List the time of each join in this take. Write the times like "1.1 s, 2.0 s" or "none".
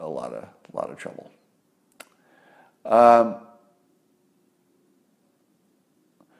none